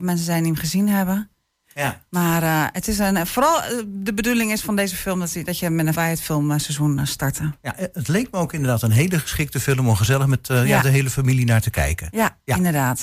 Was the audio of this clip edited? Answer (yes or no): yes